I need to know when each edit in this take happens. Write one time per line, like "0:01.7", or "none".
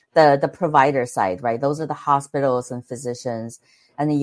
none